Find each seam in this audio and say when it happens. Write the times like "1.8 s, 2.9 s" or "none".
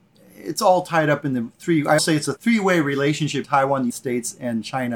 2.0 s, 2.4 s, 3.4 s, 3.9 s